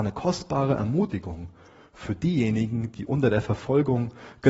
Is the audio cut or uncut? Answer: uncut